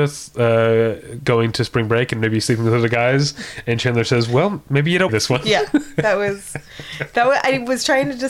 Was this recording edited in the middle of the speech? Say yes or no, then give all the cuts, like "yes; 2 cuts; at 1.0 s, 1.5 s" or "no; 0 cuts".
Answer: yes; 1 cut; at 5.1 s